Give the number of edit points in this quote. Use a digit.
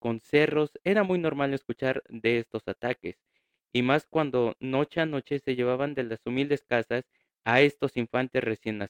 0